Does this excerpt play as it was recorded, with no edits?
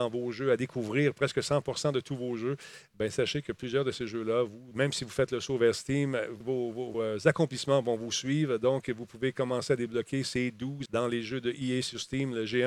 no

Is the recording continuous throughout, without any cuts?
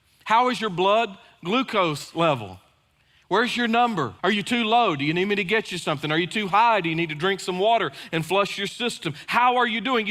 no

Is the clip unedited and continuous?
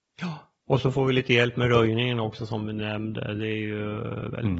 yes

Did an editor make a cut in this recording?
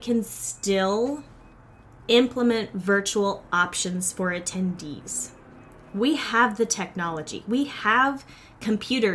no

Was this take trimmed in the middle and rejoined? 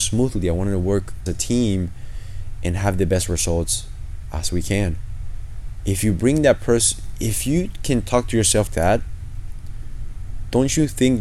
yes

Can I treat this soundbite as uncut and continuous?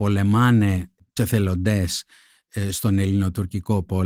no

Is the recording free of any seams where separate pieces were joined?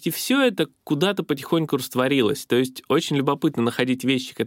yes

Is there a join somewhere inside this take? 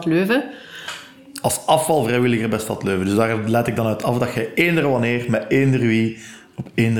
no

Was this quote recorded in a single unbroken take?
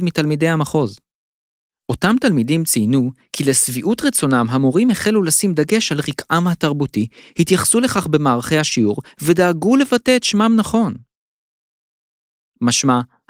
yes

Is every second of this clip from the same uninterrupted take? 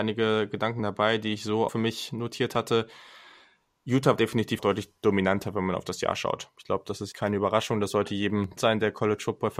no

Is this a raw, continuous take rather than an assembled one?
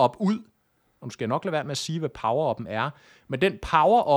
yes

